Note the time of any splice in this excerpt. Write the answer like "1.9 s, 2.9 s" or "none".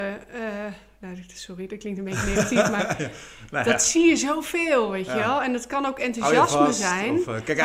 none